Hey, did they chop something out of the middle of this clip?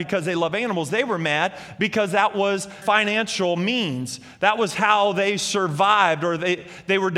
yes; 1 cut; at 2.8 s

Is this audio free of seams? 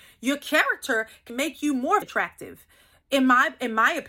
no; 2 cuts; at 1.3 s, 2.0 s

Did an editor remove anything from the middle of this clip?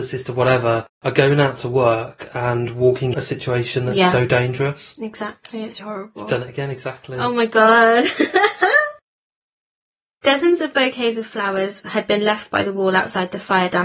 yes; 2 cuts; at 3.1 s, 5.8 s

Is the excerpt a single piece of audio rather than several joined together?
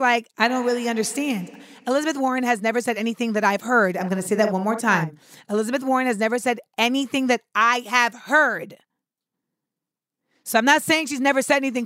yes; 0 cuts

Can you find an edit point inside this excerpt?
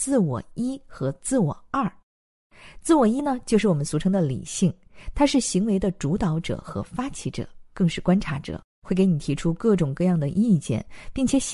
yes; 1 cut; at 8.7 s

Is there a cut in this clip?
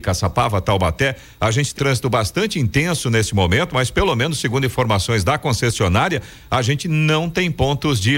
yes; 1 cut; at 1.8 s

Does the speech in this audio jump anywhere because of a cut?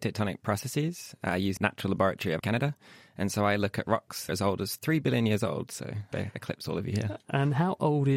yes; 4 cuts; at 1.6 s, 2.4 s, 4.3 s, 6.1 s

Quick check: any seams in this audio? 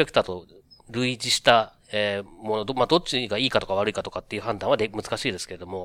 no; 0 cuts

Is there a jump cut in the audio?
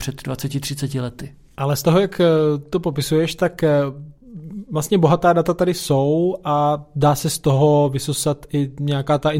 no; 0 cuts

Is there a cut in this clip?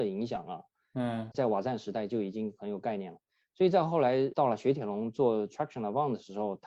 yes; 1 cut; at 1.3 s

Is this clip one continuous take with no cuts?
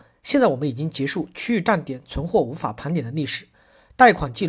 yes; 0 cuts

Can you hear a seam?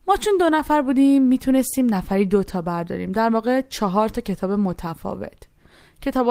no; 0 cuts

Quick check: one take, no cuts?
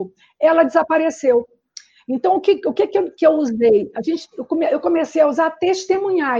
yes; 0 cuts

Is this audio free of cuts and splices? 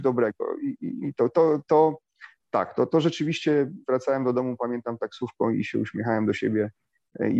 yes; 0 cuts

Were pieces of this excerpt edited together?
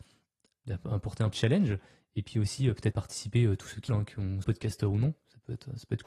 yes; 4 cuts; at 1.3 s, 2.9 s, 3.9 s, 4.4 s

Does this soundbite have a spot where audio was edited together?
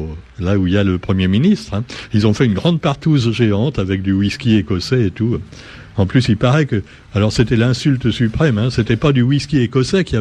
no; 0 cuts

